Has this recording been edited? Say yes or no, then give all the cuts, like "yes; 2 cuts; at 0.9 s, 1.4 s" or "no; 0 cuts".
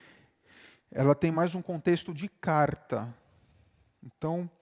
no; 0 cuts